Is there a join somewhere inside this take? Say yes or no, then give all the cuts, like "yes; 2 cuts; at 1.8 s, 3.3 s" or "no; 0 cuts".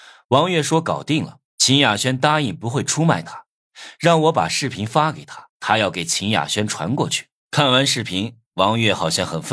yes; 3 cuts; at 1.5 s, 5.5 s, 7.4 s